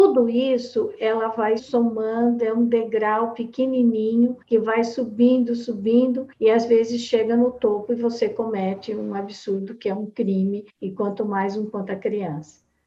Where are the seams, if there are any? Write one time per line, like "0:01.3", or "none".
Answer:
0:01.6
0:04.4
0:06.3
0:10.7
0:11.7